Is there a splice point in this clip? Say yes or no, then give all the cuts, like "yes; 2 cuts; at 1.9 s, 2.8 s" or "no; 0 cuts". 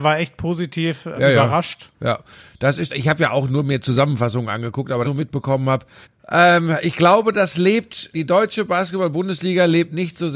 yes; 6 cuts; at 1.2 s, 1.9 s, 2.9 s, 5.0 s, 6.0 s, 8.1 s